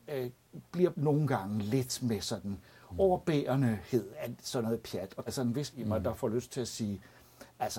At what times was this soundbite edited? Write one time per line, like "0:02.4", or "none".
0:00.9
0:05.3
0:05.7